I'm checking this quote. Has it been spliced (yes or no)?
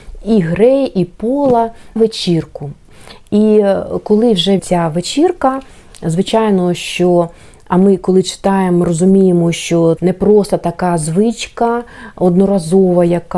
yes